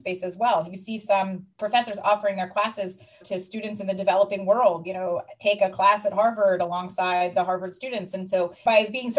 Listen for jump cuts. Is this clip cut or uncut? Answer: cut